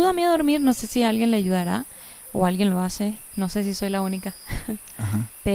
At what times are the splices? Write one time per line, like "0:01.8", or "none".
0:03.3